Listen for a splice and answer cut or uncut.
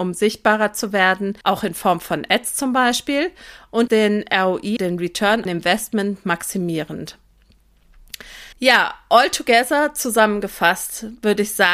cut